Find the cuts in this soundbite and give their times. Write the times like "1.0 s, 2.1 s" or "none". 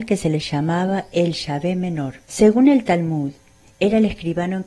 2.2 s